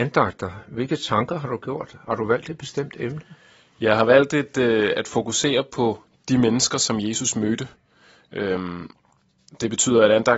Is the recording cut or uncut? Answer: uncut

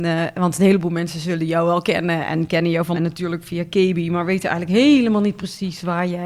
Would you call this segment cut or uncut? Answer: cut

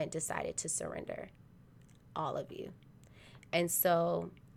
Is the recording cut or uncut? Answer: uncut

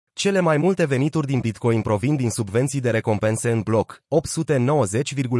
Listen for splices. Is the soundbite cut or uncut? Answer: uncut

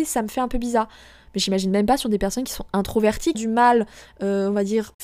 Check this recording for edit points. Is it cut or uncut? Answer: cut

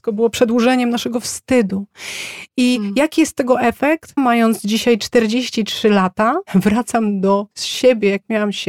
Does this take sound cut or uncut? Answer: cut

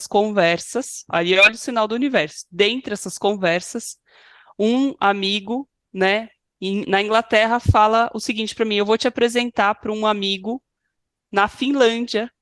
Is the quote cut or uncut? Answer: uncut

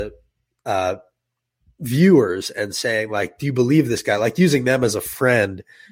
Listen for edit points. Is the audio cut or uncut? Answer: uncut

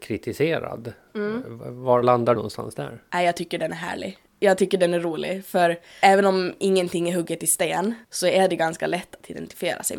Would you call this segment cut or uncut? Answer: cut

